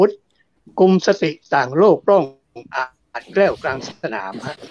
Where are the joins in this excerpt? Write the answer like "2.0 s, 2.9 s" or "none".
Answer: none

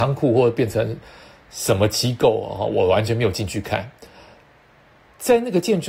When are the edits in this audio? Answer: none

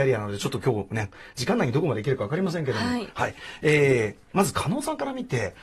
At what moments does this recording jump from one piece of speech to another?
none

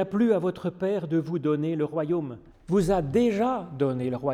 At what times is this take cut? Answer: 2.5 s

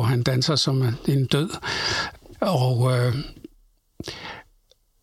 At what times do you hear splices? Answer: none

